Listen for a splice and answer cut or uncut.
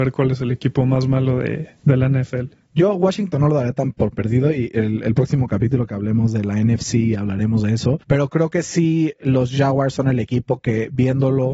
cut